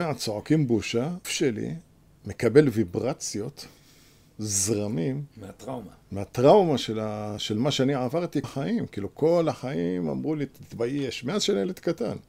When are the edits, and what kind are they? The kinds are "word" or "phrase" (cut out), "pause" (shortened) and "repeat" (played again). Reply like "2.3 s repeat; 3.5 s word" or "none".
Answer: 1.2 s word; 8.4 s word